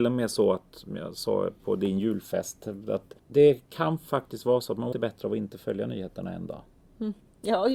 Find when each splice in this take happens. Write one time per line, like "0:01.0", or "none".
0:01.6
0:03.2
0:04.9